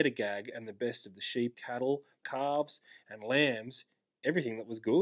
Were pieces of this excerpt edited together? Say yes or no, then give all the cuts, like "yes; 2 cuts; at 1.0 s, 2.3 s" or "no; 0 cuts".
yes; 2 cuts; at 1.5 s, 2.2 s